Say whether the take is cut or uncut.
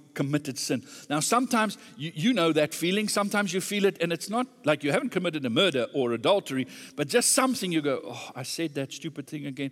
uncut